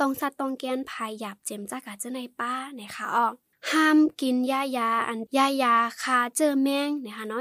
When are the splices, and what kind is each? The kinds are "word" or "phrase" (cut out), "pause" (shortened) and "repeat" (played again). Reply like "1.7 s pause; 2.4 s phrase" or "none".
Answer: none

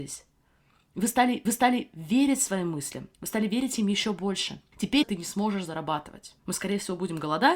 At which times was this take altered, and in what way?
1.4 s repeat; 3.1 s pause; 5.0 s phrase; 6.4 s pause

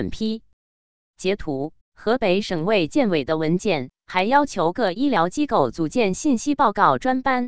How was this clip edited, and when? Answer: 1.8 s pause

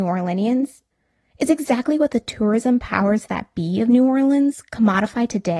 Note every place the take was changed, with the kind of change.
none

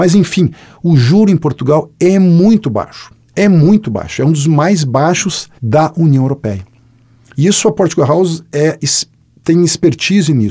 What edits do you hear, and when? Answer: 3.3 s pause; 5.6 s pause

